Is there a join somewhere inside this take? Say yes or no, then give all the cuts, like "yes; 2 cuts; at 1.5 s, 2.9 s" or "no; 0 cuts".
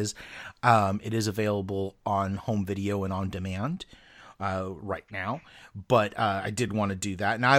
no; 0 cuts